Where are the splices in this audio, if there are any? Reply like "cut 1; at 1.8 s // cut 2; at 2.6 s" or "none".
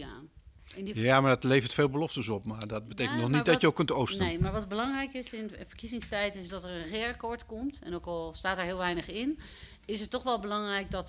none